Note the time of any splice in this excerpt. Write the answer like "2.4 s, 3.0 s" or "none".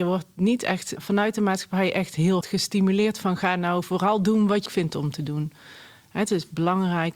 2.4 s, 4.7 s